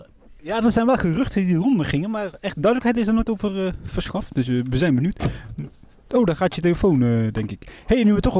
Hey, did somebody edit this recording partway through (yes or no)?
no